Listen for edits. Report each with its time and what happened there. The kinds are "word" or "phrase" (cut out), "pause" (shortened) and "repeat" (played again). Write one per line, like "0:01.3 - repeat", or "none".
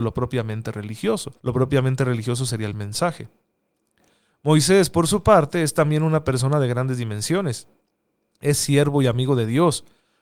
0:01.4 - pause